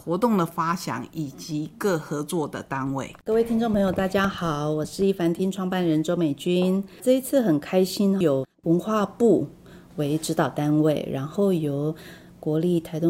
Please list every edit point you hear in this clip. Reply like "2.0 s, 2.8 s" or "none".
3.2 s, 8.5 s